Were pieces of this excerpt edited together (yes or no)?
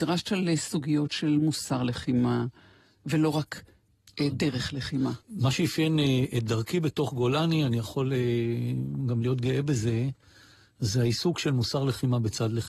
no